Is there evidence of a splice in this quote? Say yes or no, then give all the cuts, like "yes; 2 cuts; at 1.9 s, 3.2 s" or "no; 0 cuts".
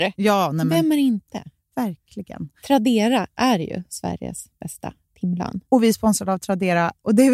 no; 0 cuts